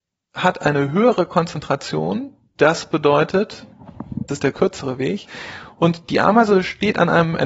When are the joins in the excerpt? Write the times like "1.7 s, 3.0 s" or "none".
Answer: 4.3 s